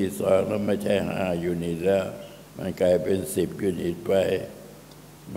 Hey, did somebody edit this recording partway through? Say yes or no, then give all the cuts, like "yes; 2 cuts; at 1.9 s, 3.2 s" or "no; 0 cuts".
yes; 1 cut; at 2.5 s